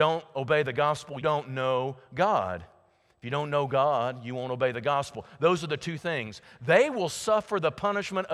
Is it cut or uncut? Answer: cut